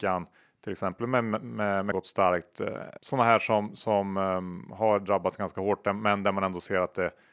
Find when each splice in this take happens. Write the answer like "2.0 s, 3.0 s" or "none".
1.9 s, 3.0 s